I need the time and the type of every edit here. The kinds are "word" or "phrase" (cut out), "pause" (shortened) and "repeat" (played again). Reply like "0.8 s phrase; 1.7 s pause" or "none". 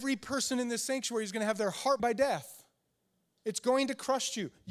2.0 s word